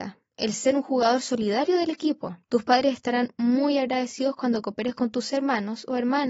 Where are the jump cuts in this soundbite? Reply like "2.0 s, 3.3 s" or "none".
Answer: 2.4 s